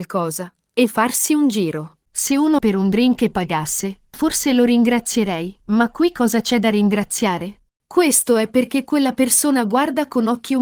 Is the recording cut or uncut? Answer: cut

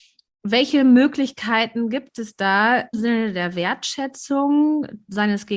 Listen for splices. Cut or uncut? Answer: cut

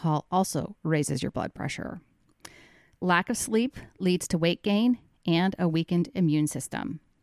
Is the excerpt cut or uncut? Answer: uncut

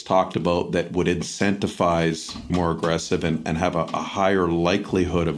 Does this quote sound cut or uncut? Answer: cut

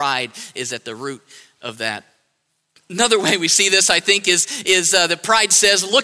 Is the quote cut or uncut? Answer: uncut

